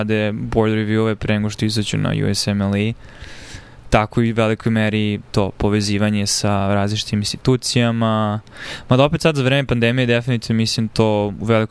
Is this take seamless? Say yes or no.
yes